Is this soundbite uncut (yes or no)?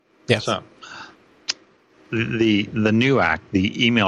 yes